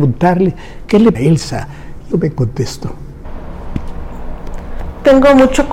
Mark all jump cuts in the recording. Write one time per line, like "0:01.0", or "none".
0:01.1
0:02.1